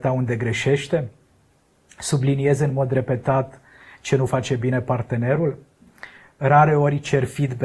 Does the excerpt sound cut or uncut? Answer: uncut